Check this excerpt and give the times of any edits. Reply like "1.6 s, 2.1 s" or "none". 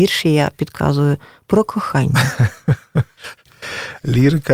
none